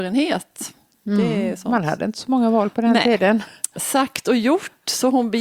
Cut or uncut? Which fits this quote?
uncut